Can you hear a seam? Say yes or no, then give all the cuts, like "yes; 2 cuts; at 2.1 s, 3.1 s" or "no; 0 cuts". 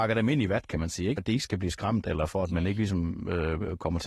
yes; 1 cut; at 1.2 s